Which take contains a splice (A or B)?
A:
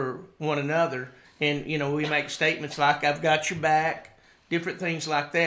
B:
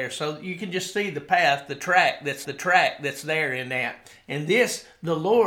B